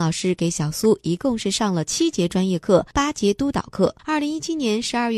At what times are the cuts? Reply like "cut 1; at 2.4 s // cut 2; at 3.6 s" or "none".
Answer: cut 1; at 2.9 s // cut 2; at 4.0 s

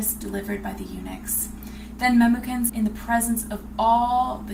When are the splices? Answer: cut 1; at 2.7 s

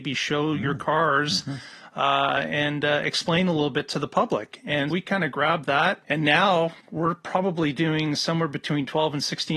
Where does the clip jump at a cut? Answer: cut 1; at 4.9 s // cut 2; at 6.0 s // cut 3; at 6.8 s

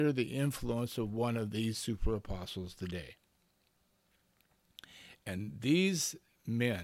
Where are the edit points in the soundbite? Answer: none

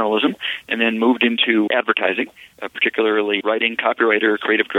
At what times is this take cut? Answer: cut 1; at 1.7 s // cut 2; at 3.4 s

